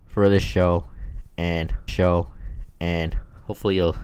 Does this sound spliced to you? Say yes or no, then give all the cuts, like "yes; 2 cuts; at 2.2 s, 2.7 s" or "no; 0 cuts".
yes; 1 cut; at 1.9 s